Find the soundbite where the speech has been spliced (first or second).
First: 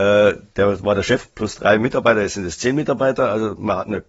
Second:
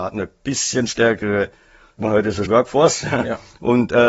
second